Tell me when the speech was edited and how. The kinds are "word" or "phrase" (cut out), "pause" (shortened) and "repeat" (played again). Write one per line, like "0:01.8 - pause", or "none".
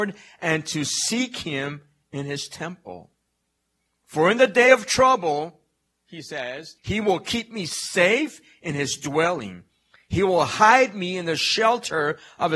0:06.8 - pause